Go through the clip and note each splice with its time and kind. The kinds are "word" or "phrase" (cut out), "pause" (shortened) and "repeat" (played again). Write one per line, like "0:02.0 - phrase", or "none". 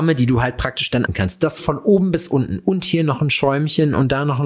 0:01.1 - word
0:01.6 - word